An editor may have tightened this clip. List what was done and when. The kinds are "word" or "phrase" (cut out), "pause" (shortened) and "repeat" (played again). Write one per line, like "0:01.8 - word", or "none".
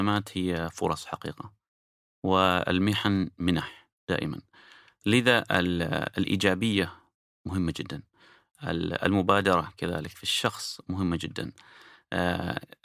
none